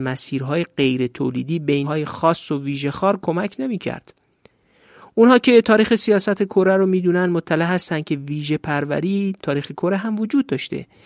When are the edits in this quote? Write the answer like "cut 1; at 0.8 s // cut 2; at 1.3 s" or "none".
cut 1; at 1.8 s // cut 2; at 9.4 s